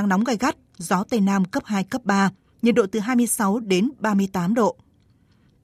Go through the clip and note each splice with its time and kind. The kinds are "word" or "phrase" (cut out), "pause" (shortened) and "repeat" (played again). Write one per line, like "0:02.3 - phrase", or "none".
none